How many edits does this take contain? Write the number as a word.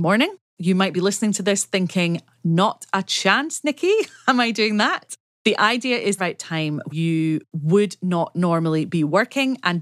two